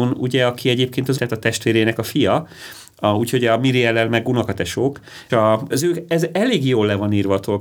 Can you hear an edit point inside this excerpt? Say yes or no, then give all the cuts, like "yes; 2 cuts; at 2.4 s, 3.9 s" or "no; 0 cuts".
yes; 4 cuts; at 1.1 s, 5.3 s, 5.7 s, 6.1 s